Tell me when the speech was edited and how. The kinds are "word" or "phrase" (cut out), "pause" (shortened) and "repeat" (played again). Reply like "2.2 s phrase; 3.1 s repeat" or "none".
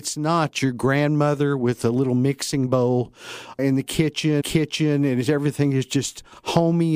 3.6 s word; 4.4 s repeat

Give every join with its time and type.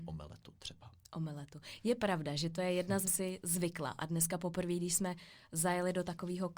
3.1 s phrase

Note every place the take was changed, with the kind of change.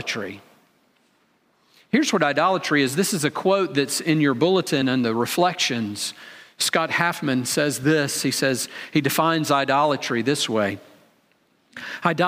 none

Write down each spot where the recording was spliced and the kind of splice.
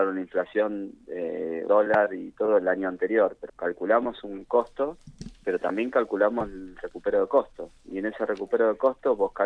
1.7 s word; 3.5 s word

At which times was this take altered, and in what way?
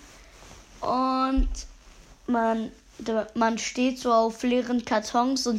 none

